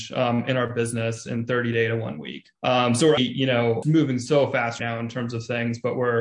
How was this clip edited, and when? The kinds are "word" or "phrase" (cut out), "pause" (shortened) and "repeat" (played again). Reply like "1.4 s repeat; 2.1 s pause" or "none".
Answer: 2.6 s pause; 3.2 s word; 3.8 s phrase; 4.8 s word